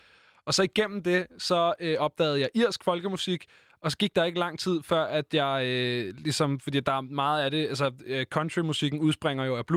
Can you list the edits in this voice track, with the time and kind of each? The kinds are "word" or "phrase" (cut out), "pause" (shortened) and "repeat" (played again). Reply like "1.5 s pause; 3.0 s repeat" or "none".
none